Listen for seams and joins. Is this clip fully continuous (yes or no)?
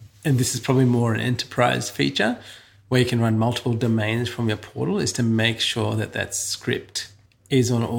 yes